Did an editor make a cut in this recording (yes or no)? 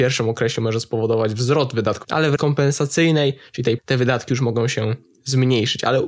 yes